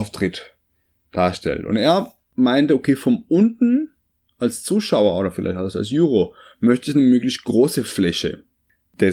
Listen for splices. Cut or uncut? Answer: uncut